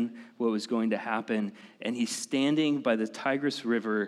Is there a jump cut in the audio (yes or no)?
no